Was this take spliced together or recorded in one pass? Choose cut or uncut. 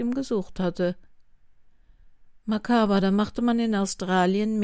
uncut